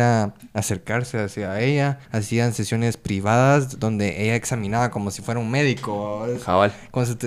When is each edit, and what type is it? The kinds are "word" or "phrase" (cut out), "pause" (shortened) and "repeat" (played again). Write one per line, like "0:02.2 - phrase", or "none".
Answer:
0:02.0 - pause

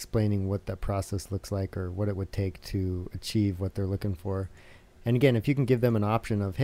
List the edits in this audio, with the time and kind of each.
none

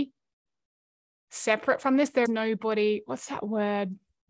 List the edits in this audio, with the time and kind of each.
0:02.3 - word

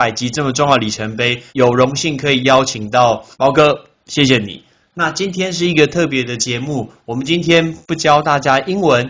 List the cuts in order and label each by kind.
0:01.5 - pause
0:03.3 - pause

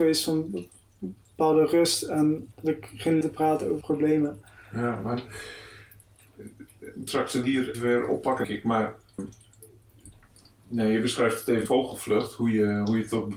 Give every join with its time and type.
0:02.5 - word
0:03.2 - word
0:03.8 - word
0:07.1 - word
0:07.4 - word
0:07.7 - word
0:08.4 - word
0:09.2 - word
0:11.7 - word

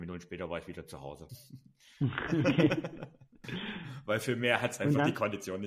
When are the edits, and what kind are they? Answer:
none

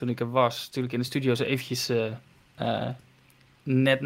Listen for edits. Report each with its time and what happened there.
none

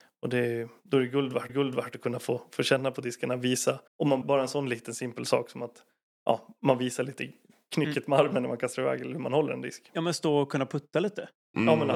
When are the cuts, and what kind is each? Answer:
0:01.5 - repeat
0:03.9 - pause
0:04.2 - word

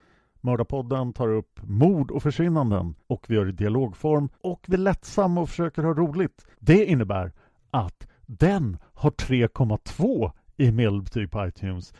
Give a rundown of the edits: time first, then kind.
0:03.0 - pause
0:04.3 - pause
0:04.7 - word
0:06.5 - pause

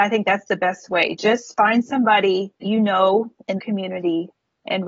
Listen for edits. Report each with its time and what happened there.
0:02.6 - word
0:03.6 - phrase

